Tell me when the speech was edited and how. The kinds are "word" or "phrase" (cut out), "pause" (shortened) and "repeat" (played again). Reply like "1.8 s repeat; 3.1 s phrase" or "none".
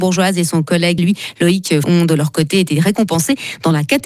1.0 s word; 1.8 s word